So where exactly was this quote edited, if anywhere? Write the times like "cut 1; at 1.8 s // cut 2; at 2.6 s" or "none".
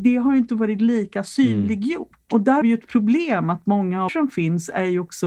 cut 1; at 2.6 s // cut 2; at 4.1 s